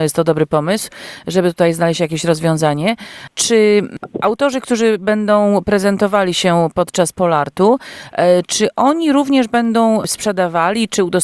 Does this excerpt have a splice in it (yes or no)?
no